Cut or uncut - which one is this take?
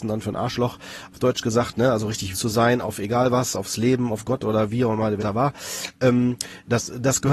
cut